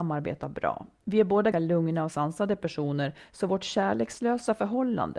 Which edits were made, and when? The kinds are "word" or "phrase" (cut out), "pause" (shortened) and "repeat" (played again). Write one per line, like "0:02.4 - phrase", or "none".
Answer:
0:01.5 - word